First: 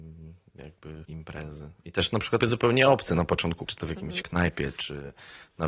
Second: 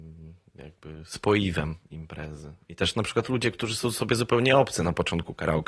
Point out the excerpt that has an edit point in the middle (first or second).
first